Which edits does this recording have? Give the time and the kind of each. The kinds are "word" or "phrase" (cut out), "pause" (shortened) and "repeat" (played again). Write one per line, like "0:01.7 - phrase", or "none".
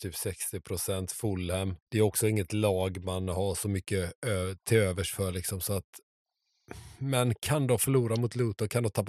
0:01.8 - pause